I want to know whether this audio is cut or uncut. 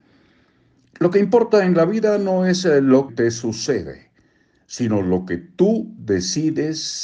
cut